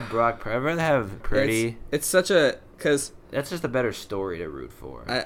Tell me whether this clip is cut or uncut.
cut